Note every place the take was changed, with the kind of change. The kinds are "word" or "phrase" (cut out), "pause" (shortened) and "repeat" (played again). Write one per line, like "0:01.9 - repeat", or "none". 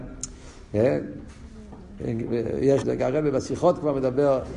0:02.8 - phrase